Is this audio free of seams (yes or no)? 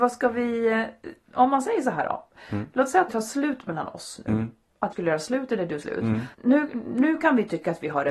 no